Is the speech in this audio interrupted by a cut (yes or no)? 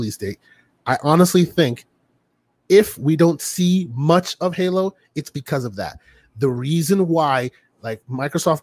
no